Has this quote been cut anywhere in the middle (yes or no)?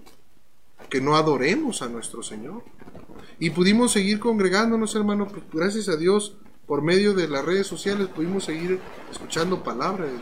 no